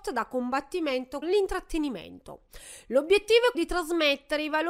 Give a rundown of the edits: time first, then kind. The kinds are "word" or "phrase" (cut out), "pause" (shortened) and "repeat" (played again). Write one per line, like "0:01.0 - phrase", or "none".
0:01.2 - word
0:03.5 - word